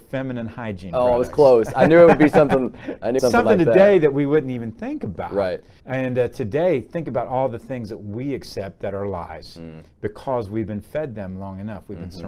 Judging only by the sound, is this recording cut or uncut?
cut